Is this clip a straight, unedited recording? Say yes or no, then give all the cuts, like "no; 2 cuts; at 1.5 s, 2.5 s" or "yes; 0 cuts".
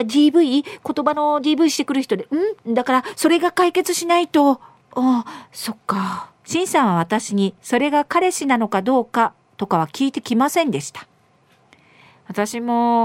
no; 4 cuts; at 2.6 s, 4.8 s, 6.4 s, 7.6 s